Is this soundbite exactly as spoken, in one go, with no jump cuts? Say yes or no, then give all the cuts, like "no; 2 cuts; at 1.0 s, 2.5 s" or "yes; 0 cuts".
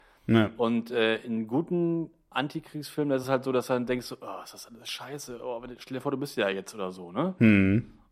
yes; 0 cuts